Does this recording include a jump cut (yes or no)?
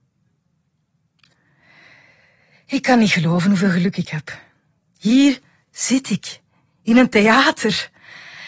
no